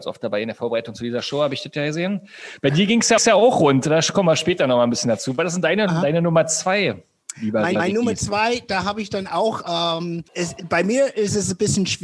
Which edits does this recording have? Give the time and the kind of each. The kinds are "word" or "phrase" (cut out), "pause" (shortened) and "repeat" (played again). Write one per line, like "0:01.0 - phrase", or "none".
0:03.2 - repeat
0:07.8 - repeat
0:10.3 - pause

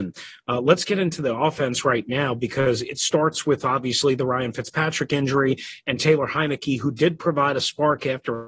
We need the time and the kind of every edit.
none

